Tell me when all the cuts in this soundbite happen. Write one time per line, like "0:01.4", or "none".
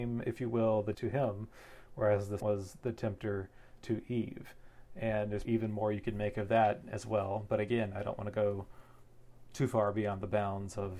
0:00.9
0:02.4
0:03.8
0:05.4